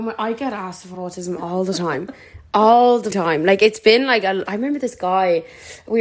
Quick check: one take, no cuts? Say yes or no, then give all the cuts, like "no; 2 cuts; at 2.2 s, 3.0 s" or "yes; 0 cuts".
no; 3 cuts; at 0.9 s, 3.1 s, 4.5 s